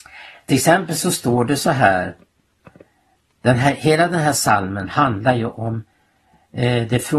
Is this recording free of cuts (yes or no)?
yes